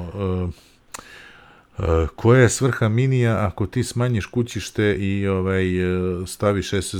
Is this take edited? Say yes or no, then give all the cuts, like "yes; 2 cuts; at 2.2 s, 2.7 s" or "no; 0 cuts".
no; 0 cuts